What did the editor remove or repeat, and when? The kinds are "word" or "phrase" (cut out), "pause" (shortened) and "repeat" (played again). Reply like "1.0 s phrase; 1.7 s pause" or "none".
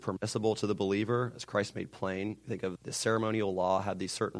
2.8 s word